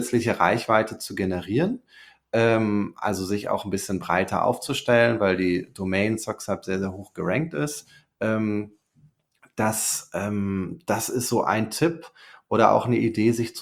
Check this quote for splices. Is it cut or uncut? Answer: uncut